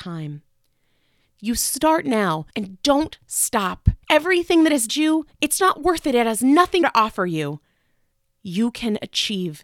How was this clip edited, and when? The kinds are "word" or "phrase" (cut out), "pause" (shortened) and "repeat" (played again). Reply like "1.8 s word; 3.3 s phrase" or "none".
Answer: 2.5 s pause; 4.0 s pause; 4.9 s word; 5.6 s word; 6.8 s word; 8.1 s pause